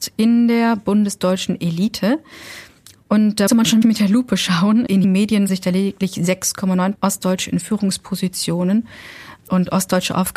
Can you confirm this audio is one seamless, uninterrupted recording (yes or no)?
no